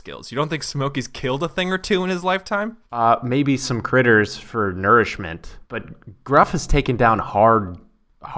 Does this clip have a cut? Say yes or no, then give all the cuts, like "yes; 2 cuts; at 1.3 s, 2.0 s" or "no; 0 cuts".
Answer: yes; 2 cuts; at 2.9 s, 5.7 s